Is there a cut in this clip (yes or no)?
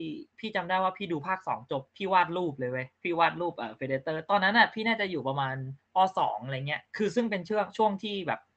yes